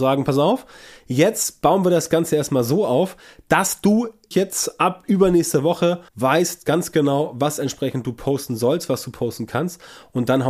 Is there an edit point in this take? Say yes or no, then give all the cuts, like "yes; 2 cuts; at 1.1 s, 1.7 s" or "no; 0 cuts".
yes; 2 cuts; at 4.3 s, 6.1 s